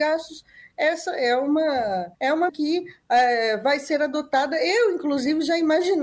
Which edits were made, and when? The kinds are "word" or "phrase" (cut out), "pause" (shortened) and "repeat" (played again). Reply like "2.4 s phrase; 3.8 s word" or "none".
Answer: 2.2 s pause; 2.5 s word